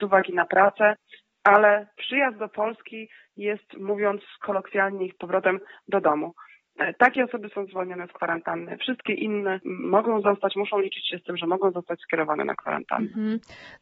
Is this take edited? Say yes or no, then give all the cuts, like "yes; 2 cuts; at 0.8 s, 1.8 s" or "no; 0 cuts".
no; 0 cuts